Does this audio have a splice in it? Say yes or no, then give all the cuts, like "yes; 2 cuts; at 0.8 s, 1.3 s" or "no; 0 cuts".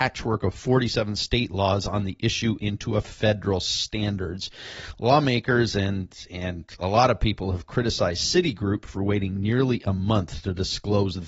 no; 0 cuts